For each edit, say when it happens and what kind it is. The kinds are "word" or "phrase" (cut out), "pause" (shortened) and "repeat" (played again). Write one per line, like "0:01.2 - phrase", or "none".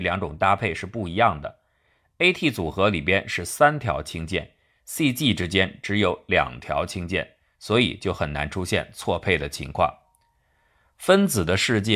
none